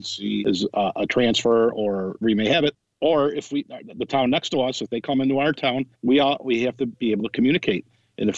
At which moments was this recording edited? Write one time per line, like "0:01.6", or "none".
0:02.2
0:05.9